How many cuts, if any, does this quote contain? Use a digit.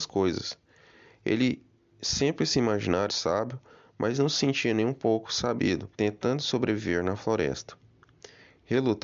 2